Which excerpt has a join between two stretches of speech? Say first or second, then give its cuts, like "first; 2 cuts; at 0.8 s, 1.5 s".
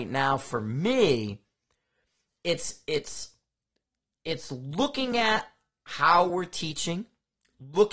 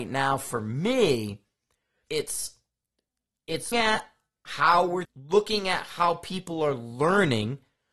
second; 3 cuts; at 2.1 s, 3.7 s, 5.0 s